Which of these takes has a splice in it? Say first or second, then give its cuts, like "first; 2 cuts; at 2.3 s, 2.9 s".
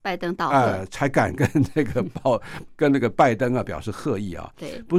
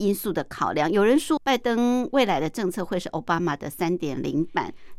second; 1 cut; at 1.4 s